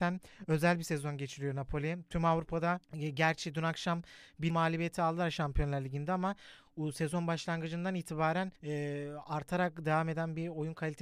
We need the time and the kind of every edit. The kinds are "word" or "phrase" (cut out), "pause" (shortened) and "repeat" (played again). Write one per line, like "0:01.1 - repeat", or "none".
0:02.8 - pause
0:04.5 - word
0:08.6 - pause